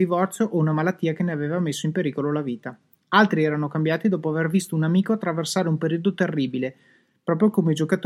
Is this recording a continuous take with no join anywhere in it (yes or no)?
yes